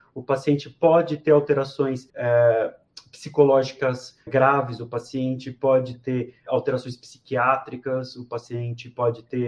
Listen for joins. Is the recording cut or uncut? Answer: cut